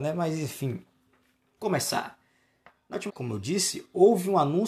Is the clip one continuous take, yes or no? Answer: no